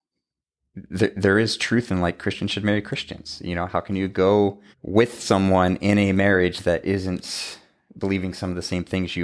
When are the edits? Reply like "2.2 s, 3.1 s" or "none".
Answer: 4.7 s